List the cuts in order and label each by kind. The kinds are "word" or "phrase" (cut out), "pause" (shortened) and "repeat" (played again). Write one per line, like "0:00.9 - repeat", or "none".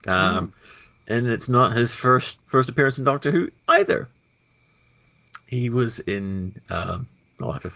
0:02.4 - word
0:03.6 - pause